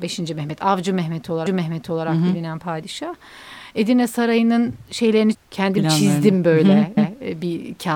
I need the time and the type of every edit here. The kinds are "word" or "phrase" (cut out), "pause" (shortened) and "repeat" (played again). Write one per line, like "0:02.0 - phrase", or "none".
0:01.5 - repeat
0:05.3 - word
0:07.0 - repeat